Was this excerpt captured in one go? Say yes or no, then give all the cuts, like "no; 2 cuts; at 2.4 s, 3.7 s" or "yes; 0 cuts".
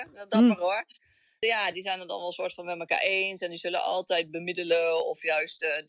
yes; 0 cuts